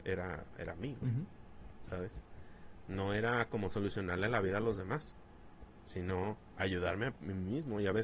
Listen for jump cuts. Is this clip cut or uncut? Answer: uncut